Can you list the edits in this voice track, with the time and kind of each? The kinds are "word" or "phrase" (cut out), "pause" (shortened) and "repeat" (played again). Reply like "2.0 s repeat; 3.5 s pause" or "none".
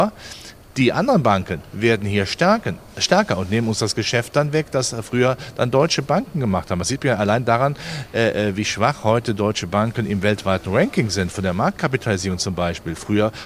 none